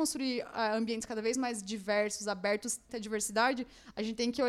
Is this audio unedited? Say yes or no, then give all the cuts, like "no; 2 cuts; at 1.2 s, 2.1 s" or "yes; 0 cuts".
no; 1 cut; at 2.9 s